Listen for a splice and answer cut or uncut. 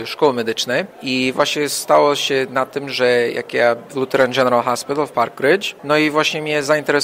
cut